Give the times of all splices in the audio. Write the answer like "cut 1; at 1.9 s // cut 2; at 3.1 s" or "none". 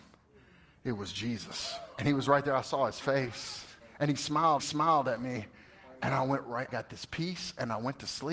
cut 1; at 1.9 s // cut 2; at 3.8 s // cut 3; at 4.6 s // cut 4; at 6.7 s